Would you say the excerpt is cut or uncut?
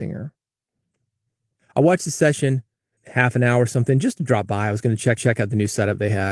cut